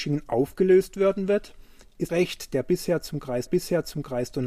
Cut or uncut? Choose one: cut